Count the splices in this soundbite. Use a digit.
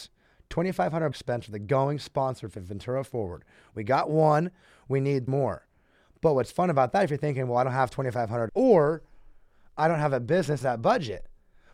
4